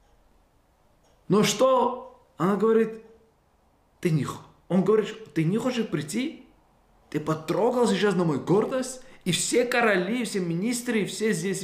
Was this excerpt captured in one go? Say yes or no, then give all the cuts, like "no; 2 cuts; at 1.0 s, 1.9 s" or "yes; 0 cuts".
yes; 0 cuts